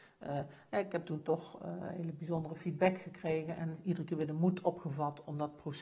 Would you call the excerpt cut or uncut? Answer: uncut